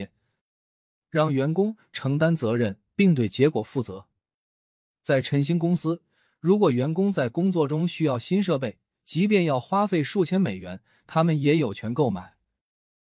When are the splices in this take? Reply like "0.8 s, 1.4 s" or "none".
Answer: none